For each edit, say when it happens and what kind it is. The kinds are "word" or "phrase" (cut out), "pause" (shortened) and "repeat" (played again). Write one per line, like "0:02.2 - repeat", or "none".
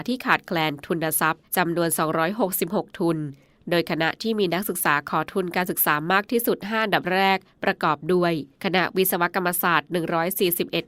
0:01.5 - pause
0:08.5 - pause